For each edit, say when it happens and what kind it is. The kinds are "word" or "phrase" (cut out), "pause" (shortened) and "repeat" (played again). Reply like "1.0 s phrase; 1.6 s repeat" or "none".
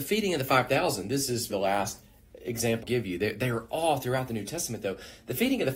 1.5 s word; 2.8 s word